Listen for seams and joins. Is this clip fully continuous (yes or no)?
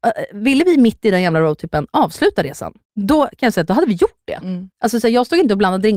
no